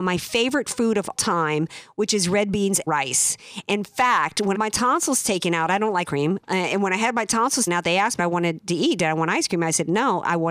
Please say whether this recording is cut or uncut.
cut